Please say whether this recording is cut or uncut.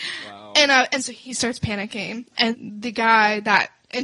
cut